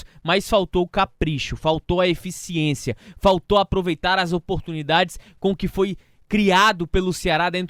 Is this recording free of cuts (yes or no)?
yes